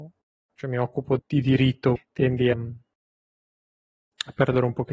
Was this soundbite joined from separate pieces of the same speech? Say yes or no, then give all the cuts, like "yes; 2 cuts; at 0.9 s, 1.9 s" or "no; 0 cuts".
yes; 3 cuts; at 1.2 s, 2.0 s, 2.5 s